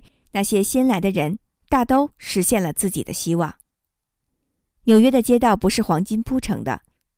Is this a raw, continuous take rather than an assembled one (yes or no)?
yes